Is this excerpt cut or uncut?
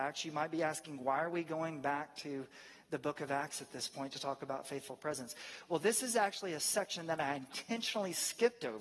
uncut